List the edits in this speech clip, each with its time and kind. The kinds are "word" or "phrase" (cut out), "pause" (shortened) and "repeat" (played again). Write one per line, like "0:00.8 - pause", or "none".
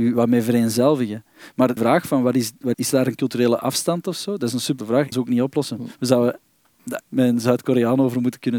0:01.8 - word
0:02.7 - word
0:04.8 - word
0:05.1 - word
0:07.0 - word

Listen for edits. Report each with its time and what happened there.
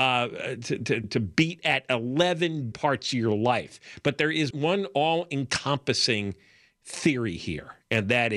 0:01.0 - word
0:02.7 - word
0:04.5 - word

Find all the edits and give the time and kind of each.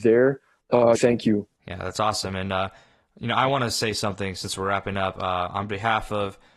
0:00.9 - phrase
0:01.6 - pause

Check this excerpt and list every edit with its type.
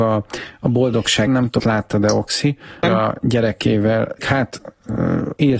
0:01.3 - word
0:01.6 - word
0:02.8 - word
0:04.2 - word

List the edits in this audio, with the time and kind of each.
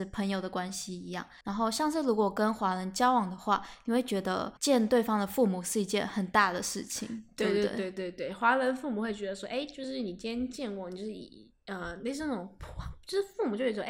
0:01.4 - pause
0:04.6 - pause

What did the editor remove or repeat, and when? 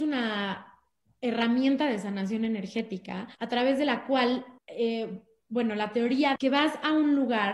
0:03.4 - pause
0:04.6 - pause
0:06.4 - word

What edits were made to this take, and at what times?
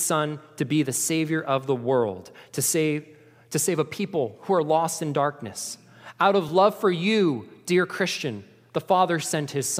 none

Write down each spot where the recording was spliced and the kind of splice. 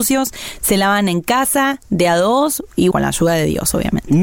0:02.9 - word

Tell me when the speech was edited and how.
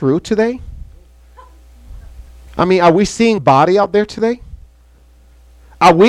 0:02.5 - pause
0:03.4 - word

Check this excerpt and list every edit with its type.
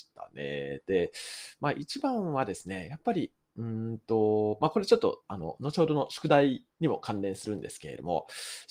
0:06.7 - pause

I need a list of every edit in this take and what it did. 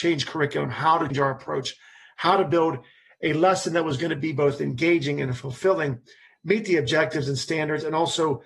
0:01.1 - word

